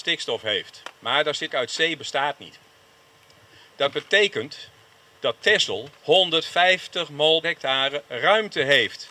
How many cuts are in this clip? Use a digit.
6